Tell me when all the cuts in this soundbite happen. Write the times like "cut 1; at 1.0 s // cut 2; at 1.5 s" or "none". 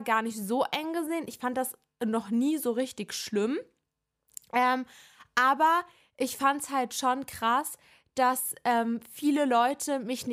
none

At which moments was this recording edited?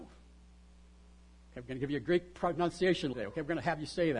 cut 1; at 3.1 s

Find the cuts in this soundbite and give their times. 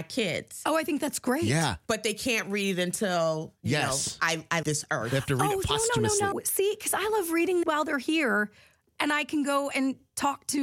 cut 1; at 4.6 s // cut 2; at 6.3 s // cut 3; at 7.6 s

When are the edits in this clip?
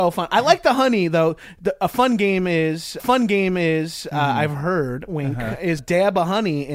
cut 1; at 3.0 s // cut 2; at 5.8 s

